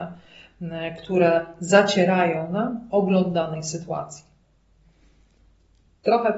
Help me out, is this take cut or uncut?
uncut